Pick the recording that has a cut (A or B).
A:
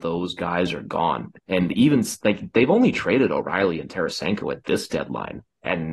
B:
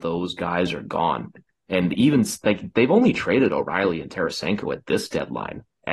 A